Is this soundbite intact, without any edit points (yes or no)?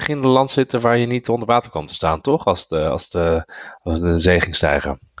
yes